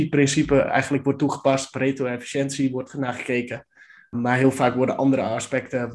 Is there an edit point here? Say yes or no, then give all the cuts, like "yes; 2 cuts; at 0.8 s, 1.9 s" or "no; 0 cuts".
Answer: no; 0 cuts